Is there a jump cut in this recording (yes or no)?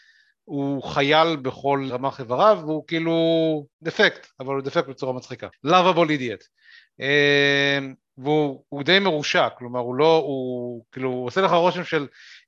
yes